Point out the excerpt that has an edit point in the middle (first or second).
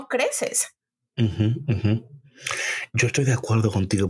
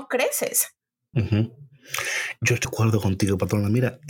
second